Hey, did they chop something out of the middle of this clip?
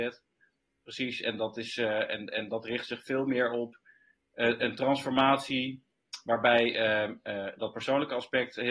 no; 0 cuts

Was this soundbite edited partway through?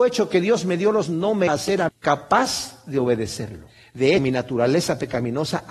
yes; 4 cuts; at 1.1 s, 1.5 s, 1.9 s, 4.2 s

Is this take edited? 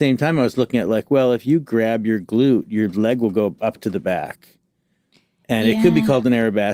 no; 0 cuts

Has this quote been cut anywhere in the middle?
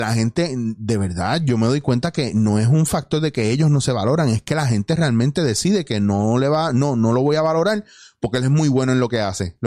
no; 0 cuts

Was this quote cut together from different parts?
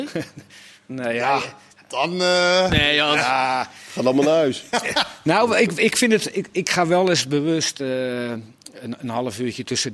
no; 0 cuts

